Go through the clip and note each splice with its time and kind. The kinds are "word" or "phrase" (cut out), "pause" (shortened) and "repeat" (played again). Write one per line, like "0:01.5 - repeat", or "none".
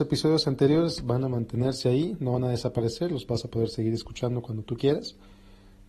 none